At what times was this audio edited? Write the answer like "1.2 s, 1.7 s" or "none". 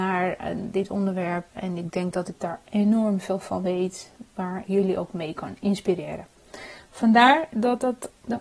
1.5 s, 4.6 s